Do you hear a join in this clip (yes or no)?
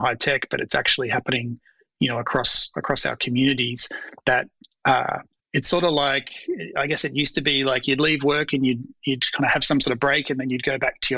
no